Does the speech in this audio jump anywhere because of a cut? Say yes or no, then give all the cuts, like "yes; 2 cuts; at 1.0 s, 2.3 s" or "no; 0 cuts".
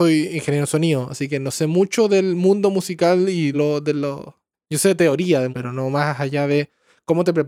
yes; 3 cuts; at 3.5 s, 4.5 s, 5.5 s